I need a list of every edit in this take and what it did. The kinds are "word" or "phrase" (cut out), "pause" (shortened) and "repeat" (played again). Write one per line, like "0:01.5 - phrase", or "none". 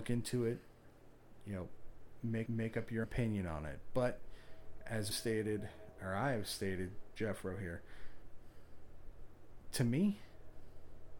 0:02.5 - repeat
0:03.0 - word
0:05.1 - word
0:07.2 - word